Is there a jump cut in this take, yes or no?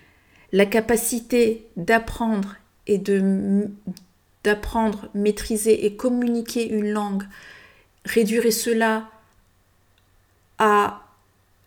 no